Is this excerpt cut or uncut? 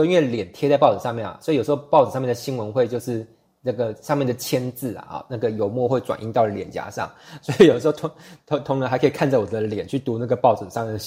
uncut